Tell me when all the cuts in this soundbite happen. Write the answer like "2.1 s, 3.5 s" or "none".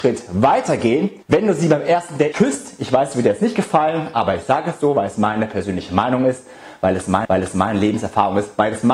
1.2 s, 2.3 s, 7.2 s